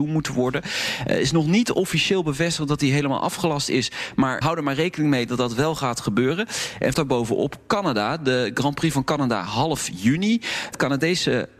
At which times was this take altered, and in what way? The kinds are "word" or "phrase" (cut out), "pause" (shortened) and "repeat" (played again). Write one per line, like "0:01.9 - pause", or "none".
0:04.4 - word
0:06.9 - phrase